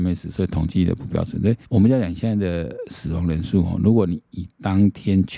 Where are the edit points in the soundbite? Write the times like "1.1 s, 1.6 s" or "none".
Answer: 1.6 s